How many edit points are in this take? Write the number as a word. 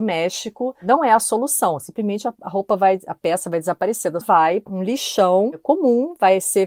two